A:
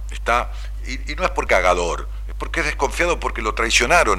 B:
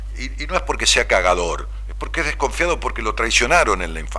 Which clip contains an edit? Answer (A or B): A